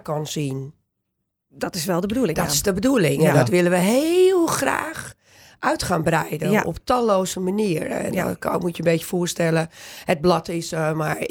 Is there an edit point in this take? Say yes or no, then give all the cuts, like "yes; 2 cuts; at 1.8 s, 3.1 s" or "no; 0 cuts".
no; 0 cuts